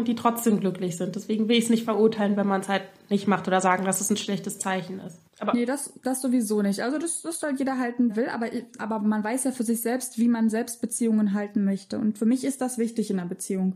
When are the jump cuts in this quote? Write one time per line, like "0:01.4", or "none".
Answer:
0:05.3
0:08.1
0:08.8